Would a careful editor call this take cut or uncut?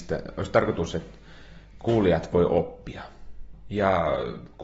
uncut